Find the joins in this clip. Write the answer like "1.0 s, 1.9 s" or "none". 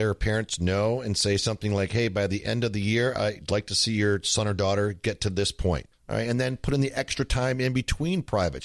none

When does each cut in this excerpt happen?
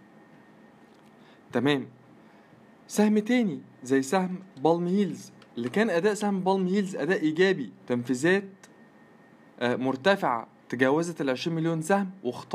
none

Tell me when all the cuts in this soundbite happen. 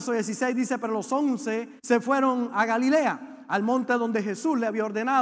1.8 s

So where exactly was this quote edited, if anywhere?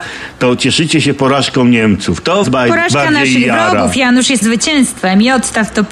2.4 s, 4.4 s

